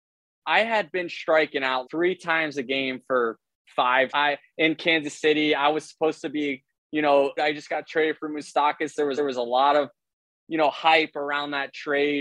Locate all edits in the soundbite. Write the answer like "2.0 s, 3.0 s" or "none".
1.8 s, 4.1 s, 7.4 s, 9.2 s